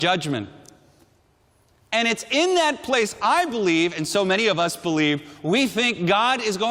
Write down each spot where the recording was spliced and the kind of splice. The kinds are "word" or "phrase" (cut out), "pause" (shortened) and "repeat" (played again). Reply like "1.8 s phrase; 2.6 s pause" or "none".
none